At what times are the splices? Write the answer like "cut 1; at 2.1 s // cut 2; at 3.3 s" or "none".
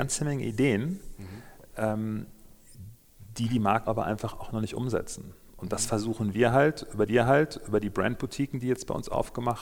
cut 1; at 3.9 s // cut 2; at 7.1 s